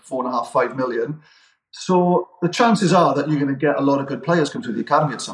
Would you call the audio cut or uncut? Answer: uncut